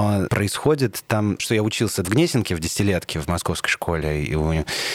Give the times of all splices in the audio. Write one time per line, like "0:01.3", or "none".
0:01.4
0:02.0